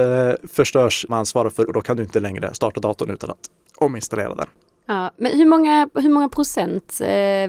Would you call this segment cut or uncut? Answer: cut